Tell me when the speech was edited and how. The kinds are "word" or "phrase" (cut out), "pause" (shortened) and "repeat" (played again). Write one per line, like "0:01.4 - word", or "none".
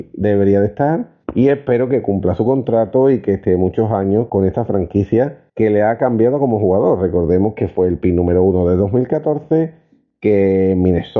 0:01.2 - pause
0:04.3 - word
0:05.5 - pause